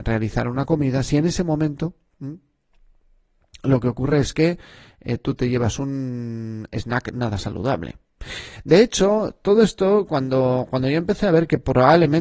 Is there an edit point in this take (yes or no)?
no